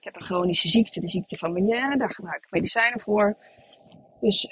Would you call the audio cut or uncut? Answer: uncut